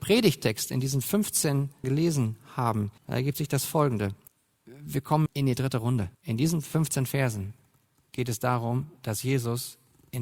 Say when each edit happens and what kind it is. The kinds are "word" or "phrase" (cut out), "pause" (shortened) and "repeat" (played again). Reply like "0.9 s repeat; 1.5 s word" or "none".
1.8 s word; 3.0 s pause; 4.3 s pause; 5.3 s word; 6.1 s pause